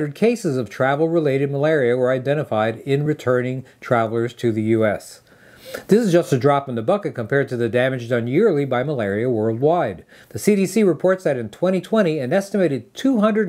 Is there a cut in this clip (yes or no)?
no